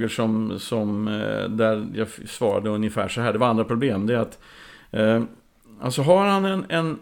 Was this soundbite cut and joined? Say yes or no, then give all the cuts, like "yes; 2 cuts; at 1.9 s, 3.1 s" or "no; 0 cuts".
no; 0 cuts